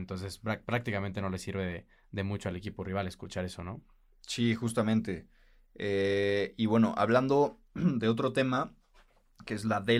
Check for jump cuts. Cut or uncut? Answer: uncut